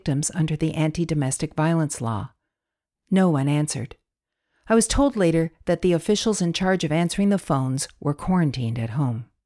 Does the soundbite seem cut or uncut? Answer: uncut